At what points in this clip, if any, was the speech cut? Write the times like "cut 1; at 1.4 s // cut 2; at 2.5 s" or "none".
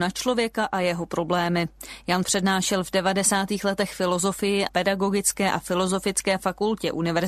cut 1; at 2.2 s // cut 2; at 4.7 s